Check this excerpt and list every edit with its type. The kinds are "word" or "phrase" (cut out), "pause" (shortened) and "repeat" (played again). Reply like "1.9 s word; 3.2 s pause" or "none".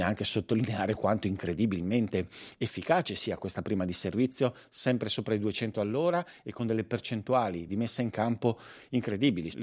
none